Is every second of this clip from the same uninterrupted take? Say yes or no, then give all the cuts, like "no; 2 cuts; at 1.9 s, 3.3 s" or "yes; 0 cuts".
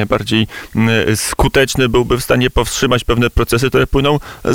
yes; 0 cuts